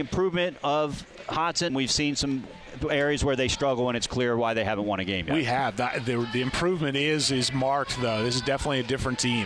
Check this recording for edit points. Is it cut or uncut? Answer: cut